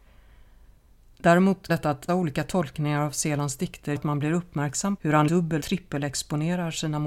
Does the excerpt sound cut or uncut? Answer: cut